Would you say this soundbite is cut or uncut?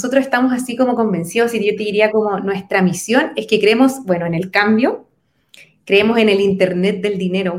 uncut